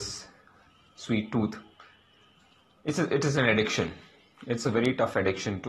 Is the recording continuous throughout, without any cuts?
yes; 0 cuts

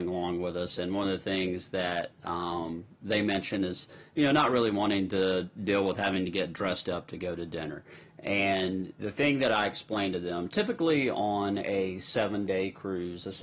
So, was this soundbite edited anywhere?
no; 0 cuts

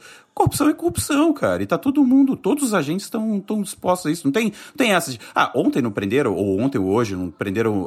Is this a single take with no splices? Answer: yes; 0 cuts

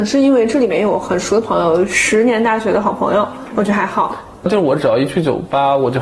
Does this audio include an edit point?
no; 0 cuts

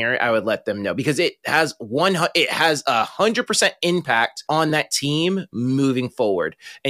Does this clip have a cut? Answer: no; 0 cuts

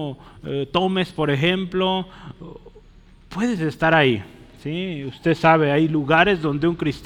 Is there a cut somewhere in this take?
no; 0 cuts

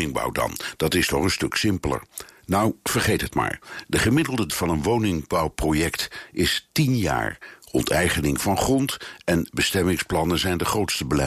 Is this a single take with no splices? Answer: no; 1 cut; at 4.5 s

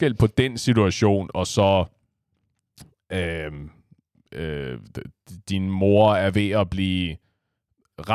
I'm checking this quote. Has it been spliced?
no; 0 cuts

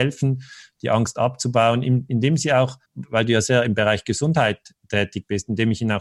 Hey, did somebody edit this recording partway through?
yes; 1 cut; at 2.9 s

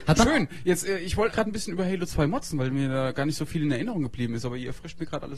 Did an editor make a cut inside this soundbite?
yes; 1 cut; at 1.3 s

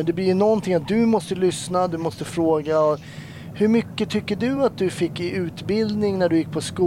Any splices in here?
no; 0 cuts

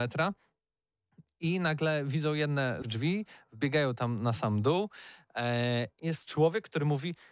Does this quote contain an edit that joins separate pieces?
yes; 2 cuts; at 2.8 s, 6.0 s

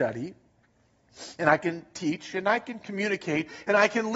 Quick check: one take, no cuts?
yes; 0 cuts

